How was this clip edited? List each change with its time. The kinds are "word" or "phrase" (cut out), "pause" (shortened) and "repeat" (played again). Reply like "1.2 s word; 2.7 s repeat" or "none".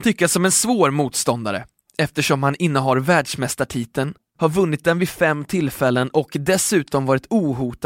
none